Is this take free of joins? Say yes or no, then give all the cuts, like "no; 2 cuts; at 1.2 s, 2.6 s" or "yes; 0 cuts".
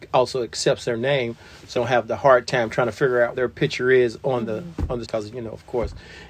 no; 3 cuts; at 1.8 s, 3.3 s, 5.0 s